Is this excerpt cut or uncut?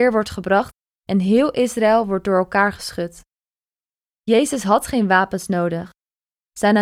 uncut